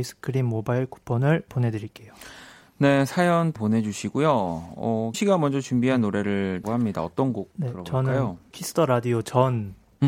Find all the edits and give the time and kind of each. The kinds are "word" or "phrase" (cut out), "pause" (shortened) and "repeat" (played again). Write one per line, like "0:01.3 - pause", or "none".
0:03.6 - word
0:05.1 - word
0:06.6 - word
0:08.5 - word